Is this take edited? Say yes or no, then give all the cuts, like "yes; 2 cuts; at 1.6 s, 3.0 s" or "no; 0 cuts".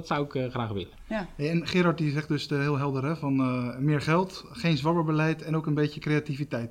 no; 0 cuts